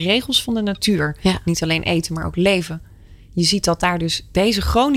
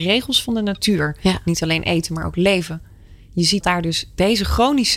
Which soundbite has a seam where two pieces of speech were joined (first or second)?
second